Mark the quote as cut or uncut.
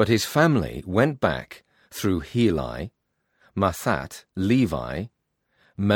cut